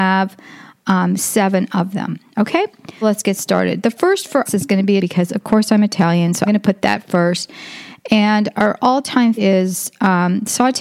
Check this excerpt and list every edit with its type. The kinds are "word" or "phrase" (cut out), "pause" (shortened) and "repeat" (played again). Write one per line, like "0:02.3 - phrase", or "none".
0:03.0 - word
0:04.5 - word
0:05.0 - word
0:06.5 - word
0:09.4 - word